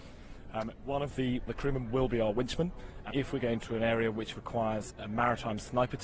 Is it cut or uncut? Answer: cut